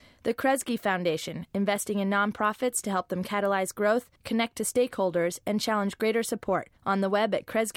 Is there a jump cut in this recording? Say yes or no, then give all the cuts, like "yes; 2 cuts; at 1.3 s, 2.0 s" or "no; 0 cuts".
yes; 2 cuts; at 4.2 s, 6.8 s